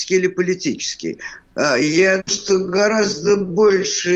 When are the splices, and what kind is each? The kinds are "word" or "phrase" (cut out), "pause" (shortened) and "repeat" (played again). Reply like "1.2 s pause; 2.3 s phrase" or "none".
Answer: 2.2 s word